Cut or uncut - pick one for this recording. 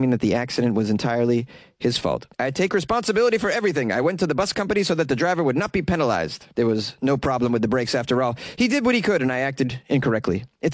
cut